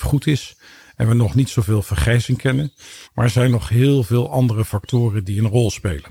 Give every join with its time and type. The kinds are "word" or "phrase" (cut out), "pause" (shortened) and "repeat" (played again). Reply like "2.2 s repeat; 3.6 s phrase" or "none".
3.0 s pause